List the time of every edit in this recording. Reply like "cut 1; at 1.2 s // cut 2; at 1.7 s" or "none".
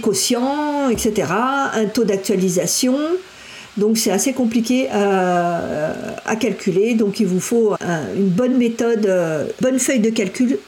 cut 1; at 7.8 s // cut 2; at 9.6 s